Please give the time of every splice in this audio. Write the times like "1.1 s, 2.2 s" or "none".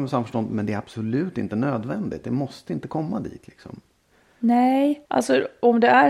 5.1 s